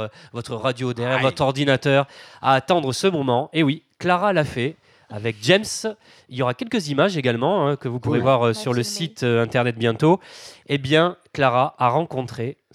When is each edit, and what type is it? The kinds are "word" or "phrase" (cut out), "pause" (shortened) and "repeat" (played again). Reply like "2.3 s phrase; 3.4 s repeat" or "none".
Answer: none